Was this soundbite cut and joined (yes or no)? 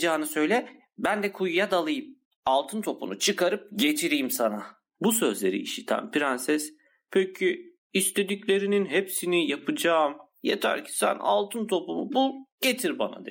no